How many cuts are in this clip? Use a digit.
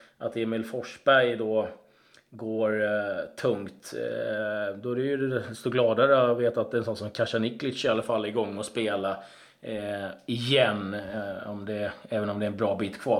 0